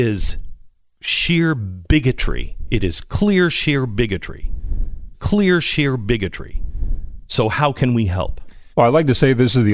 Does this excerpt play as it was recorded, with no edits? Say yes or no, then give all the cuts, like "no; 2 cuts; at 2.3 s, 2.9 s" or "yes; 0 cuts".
no; 2 cuts; at 5.1 s, 8.7 s